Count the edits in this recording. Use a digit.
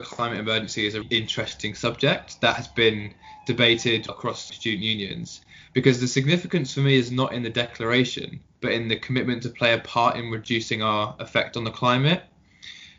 3